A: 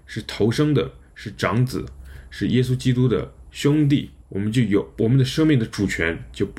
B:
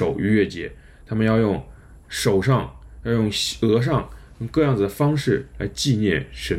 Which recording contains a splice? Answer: A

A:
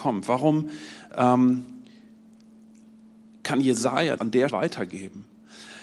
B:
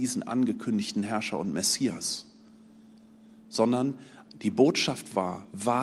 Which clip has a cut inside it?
A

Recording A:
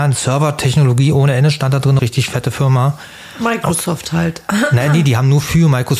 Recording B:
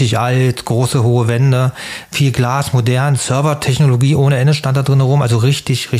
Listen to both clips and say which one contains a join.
A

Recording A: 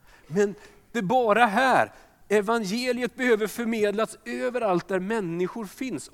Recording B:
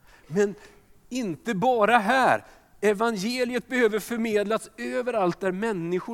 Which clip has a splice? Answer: A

